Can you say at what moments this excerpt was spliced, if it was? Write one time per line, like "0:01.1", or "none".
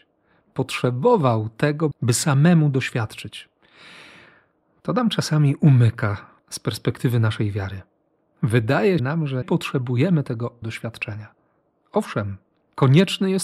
0:01.9
0:09.0
0:09.4
0:10.6